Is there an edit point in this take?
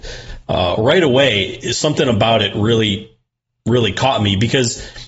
no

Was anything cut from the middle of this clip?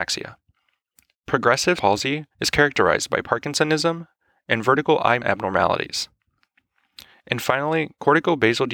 yes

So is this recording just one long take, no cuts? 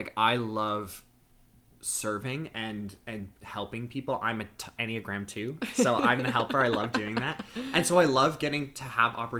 no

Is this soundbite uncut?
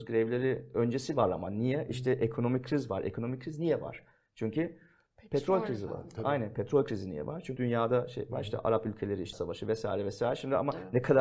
no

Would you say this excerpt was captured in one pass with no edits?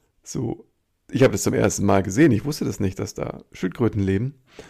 yes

